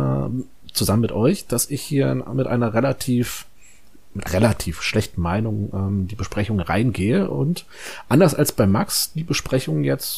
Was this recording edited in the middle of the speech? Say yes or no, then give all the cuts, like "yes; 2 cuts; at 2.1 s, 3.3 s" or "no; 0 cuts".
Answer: yes; 1 cut; at 4.3 s